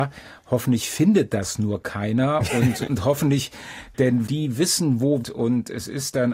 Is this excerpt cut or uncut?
cut